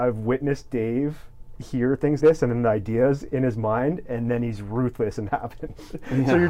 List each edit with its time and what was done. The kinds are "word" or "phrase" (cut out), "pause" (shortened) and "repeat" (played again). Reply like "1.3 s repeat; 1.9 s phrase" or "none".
2.2 s word; 5.3 s phrase